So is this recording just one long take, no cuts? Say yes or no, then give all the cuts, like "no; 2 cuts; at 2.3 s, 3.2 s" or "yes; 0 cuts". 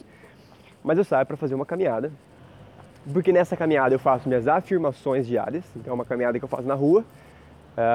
yes; 0 cuts